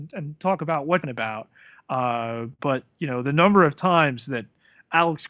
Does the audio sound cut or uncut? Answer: cut